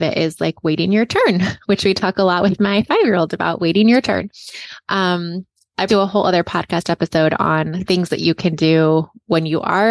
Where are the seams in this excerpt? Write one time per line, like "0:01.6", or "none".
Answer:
0:05.9